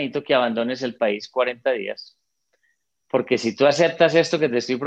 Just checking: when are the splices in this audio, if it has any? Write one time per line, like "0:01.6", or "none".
none